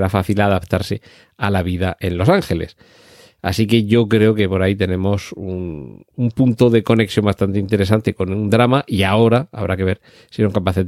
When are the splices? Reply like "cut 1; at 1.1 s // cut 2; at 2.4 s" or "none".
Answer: none

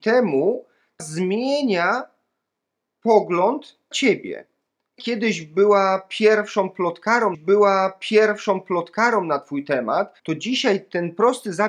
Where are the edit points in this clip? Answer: cut 1; at 1.0 s // cut 2; at 3.9 s // cut 3; at 5.0 s // cut 4; at 7.3 s // cut 5; at 10.2 s

